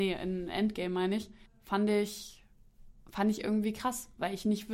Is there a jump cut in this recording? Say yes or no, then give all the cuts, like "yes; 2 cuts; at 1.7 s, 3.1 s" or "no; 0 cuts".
yes; 2 cuts; at 1.5 s, 3.0 s